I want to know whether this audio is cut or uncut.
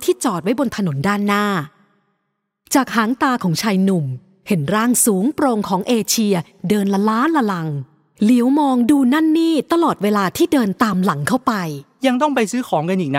uncut